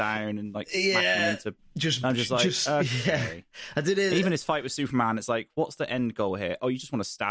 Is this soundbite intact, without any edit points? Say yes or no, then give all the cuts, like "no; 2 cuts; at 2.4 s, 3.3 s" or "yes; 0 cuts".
yes; 0 cuts